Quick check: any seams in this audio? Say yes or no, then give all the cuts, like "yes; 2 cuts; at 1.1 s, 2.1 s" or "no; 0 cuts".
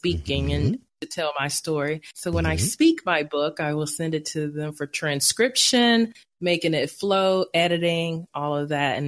no; 0 cuts